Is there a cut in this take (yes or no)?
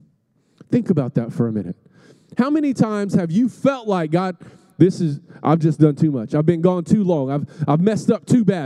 no